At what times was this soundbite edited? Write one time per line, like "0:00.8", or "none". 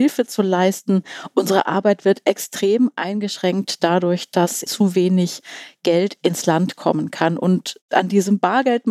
0:04.7